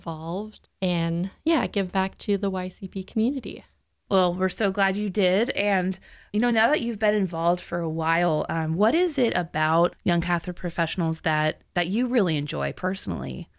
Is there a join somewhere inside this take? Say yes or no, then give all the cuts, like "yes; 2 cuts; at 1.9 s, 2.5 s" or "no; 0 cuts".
no; 0 cuts